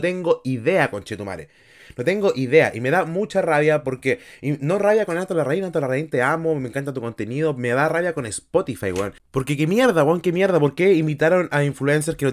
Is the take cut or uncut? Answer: cut